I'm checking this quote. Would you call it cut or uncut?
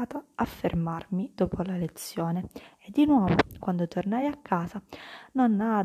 uncut